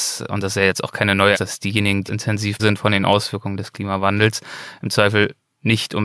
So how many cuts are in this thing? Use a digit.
3